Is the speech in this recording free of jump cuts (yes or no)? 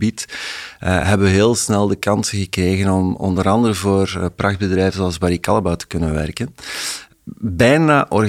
yes